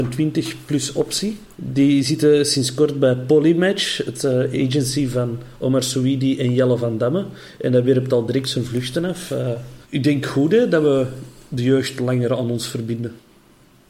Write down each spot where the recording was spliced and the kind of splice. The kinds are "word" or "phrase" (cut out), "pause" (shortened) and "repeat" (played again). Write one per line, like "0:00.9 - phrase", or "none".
0:01.5 - pause
0:09.8 - pause

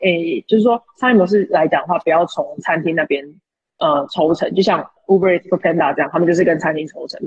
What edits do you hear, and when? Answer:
none

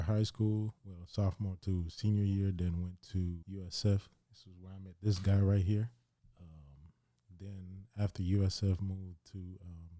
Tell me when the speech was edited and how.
0:03.4 - pause
0:06.2 - pause

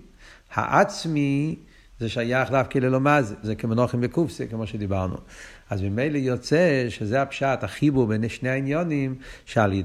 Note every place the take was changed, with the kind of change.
0:03.4 - word

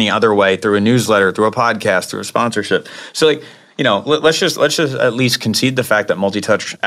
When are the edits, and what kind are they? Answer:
none

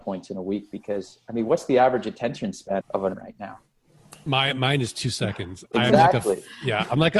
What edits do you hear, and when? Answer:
0:02.8 - phrase
0:03.1 - word

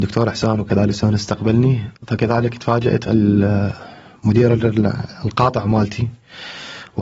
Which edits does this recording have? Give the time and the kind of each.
0:00.9 - word
0:02.0 - pause
0:03.0 - word

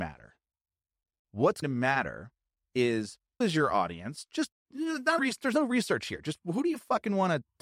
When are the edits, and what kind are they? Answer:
0:01.6 - word
0:03.4 - word
0:05.2 - word

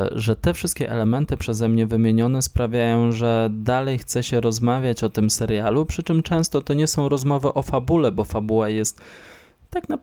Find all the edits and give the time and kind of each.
none

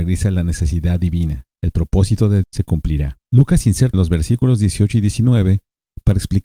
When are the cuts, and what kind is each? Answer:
0:01.6 - pause
0:02.4 - word
0:03.2 - pause
0:03.9 - phrase

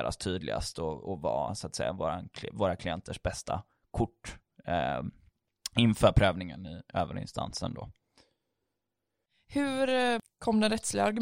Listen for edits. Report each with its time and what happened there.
none

